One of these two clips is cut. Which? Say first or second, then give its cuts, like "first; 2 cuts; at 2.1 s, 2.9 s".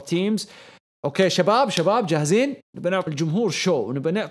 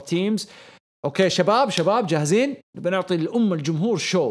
first; 1 cut; at 3.1 s